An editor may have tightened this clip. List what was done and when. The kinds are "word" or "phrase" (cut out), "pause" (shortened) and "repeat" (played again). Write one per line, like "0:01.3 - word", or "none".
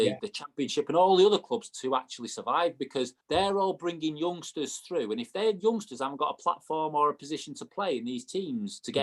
0:03.2 - pause